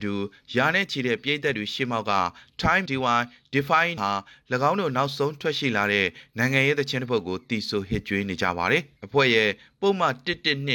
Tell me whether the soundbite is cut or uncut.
cut